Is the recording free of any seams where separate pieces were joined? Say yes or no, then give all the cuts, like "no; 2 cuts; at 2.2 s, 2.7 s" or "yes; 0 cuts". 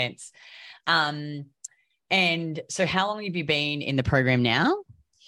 yes; 0 cuts